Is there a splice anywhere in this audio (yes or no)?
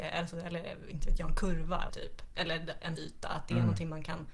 yes